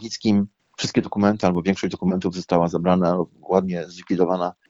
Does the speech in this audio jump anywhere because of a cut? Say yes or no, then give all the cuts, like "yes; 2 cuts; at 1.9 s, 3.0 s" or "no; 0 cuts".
no; 0 cuts